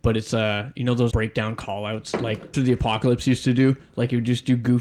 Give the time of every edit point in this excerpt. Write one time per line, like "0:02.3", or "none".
0:01.1
0:02.5